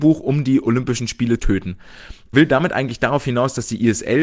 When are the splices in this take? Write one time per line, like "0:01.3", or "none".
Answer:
0:01.4
0:02.3